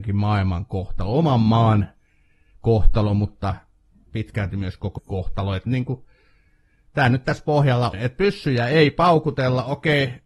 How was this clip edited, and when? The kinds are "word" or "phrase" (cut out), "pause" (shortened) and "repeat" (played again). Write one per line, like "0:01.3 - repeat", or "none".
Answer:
0:05.0 - word
0:05.7 - word
0:07.9 - word